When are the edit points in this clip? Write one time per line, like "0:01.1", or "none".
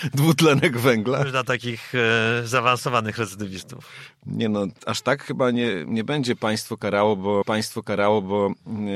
0:07.4